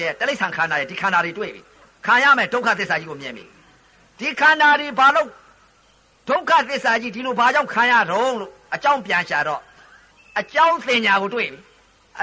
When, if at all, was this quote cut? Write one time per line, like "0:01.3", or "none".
0:10.1